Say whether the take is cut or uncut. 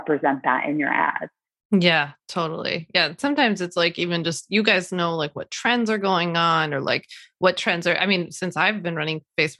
uncut